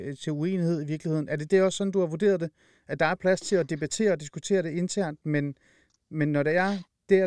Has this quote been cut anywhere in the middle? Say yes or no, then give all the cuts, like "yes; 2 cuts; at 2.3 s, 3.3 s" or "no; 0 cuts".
no; 0 cuts